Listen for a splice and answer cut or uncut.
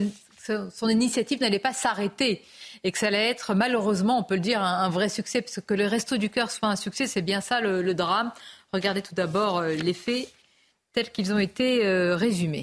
uncut